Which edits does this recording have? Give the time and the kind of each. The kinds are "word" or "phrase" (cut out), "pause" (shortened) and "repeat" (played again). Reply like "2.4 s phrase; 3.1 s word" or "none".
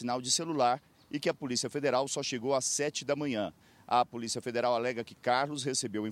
none